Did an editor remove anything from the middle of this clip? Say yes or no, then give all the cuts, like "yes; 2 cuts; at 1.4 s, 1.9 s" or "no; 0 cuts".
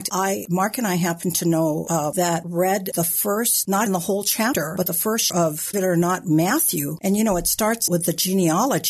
yes; 5 cuts; at 2.1 s, 3.9 s, 5.3 s, 5.7 s, 7.9 s